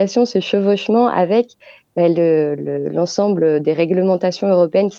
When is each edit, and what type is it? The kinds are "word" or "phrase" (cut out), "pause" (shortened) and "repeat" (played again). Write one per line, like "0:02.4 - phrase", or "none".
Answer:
none